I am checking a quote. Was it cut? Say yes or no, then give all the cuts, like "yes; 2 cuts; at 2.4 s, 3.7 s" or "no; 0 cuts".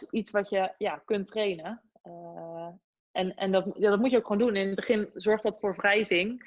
no; 0 cuts